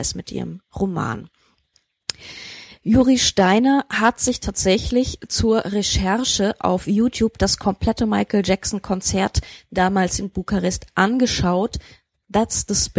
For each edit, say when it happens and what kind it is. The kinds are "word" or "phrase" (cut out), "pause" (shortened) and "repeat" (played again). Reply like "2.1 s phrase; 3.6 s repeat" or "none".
none